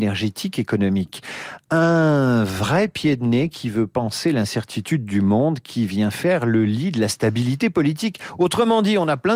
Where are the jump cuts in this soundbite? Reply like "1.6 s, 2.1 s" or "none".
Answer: none